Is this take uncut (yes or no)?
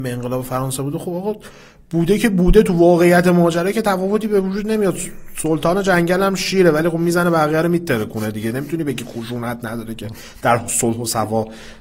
yes